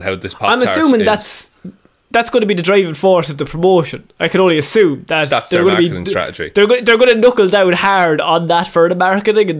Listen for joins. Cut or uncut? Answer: uncut